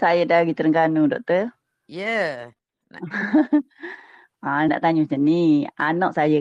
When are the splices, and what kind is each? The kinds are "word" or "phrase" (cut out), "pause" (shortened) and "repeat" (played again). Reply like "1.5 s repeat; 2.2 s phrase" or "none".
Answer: 4.7 s word